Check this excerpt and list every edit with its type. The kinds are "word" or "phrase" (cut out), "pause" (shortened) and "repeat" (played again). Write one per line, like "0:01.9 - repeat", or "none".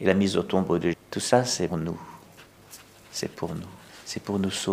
0:00.9 - word
0:01.7 - word